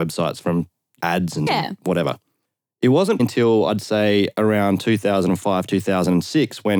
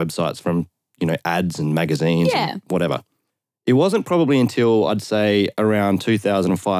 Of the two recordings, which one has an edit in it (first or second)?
first